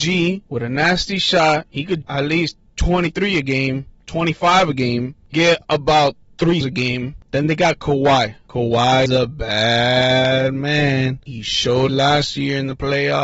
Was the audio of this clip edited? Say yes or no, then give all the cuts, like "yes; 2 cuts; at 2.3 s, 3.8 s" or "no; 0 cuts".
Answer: yes; 5 cuts; at 2.0 s, 5.3 s, 6.6 s, 9.1 s, 11.9 s